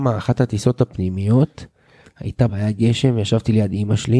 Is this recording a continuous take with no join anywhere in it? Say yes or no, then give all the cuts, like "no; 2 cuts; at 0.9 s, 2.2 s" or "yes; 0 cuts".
no; 1 cut; at 2.5 s